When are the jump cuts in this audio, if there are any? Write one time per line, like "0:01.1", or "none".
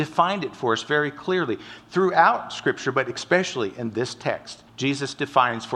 0:04.7